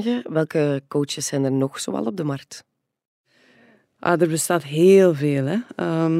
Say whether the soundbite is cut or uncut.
uncut